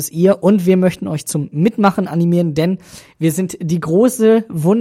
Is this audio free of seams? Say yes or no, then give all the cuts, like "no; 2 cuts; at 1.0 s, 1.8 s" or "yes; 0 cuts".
yes; 0 cuts